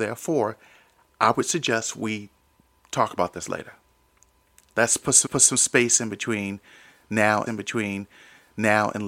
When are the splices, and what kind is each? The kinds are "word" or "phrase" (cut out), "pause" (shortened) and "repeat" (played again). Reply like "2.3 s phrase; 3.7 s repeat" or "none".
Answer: 5.3 s repeat; 7.5 s repeat

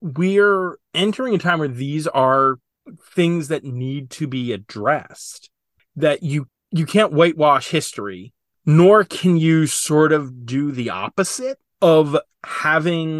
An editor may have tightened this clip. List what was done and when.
none

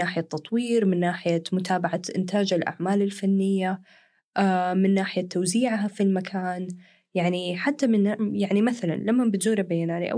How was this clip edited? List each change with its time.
none

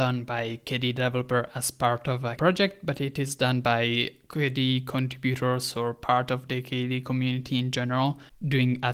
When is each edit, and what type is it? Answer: 2.4 s word

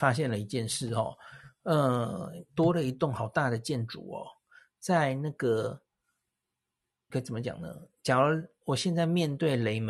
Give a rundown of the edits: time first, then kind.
7.1 s word

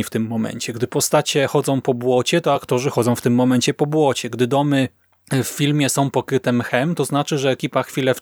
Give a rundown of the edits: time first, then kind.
none

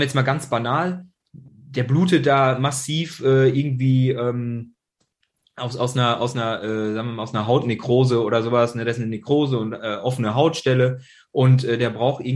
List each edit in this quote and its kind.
none

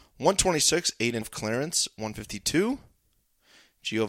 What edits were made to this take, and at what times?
1.2 s word

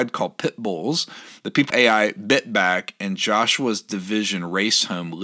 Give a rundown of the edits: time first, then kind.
1.7 s word

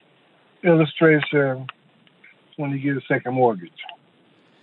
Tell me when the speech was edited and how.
2.5 s phrase

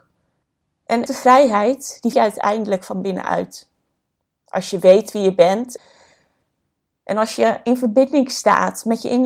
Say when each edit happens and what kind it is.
1.1 s word; 2.1 s word

